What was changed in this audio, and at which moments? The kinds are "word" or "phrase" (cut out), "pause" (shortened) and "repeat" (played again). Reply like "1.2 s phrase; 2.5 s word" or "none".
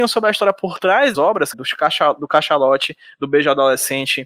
1.1 s word; 1.5 s word